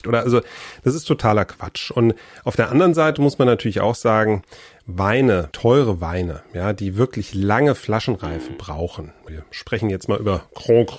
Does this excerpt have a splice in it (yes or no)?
yes